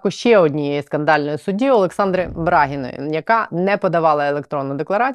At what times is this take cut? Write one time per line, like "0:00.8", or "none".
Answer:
none